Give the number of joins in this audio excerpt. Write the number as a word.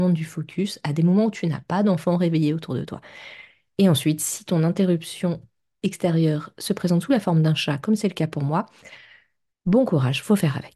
zero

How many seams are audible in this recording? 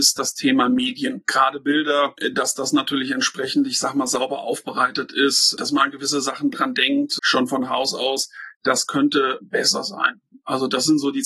two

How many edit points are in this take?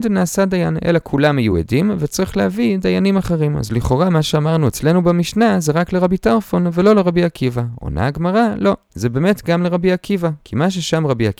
zero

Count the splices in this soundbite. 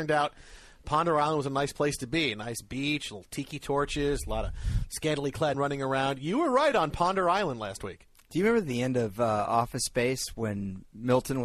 one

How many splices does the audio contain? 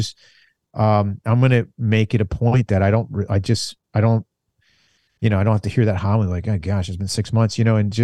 zero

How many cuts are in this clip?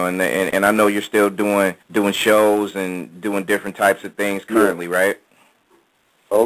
one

